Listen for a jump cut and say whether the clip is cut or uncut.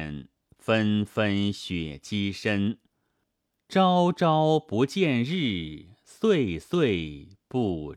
uncut